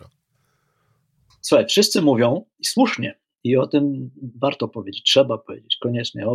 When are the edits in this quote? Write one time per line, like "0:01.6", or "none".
none